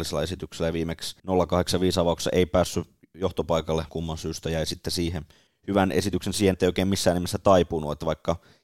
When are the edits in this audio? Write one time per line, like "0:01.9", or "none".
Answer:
0:01.2
0:03.9
0:05.5
0:06.5

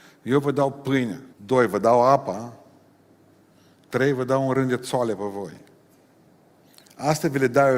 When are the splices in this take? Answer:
0:01.3

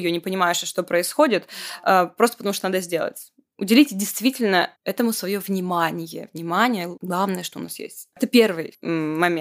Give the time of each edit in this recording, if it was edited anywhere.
0:04.8

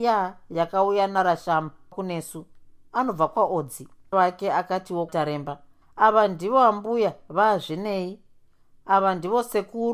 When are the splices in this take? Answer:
0:01.9
0:04.1
0:05.1
0:05.8

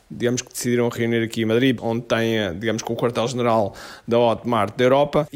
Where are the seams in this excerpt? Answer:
none

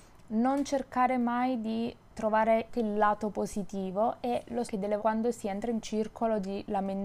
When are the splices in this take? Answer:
0:02.7
0:04.7
0:05.0
0:05.8

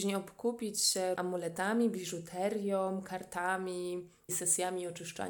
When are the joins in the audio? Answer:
0:01.2
0:04.3

